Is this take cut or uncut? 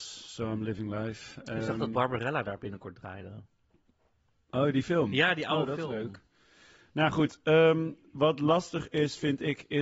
uncut